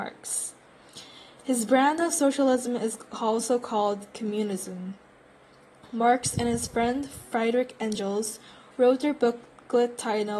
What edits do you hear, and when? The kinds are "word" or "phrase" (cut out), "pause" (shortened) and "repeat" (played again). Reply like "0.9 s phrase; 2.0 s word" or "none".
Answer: none